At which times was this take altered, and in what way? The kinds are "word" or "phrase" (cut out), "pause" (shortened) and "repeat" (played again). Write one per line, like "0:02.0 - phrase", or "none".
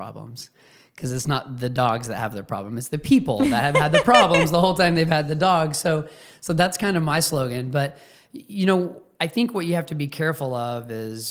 none